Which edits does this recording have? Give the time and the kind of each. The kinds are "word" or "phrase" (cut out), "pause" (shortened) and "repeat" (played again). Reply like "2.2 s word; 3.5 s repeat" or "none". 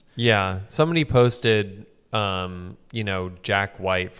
none